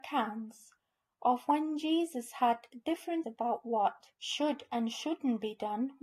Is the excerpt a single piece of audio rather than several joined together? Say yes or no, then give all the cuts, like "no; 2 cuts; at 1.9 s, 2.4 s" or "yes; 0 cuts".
no; 2 cuts; at 3.2 s, 4.1 s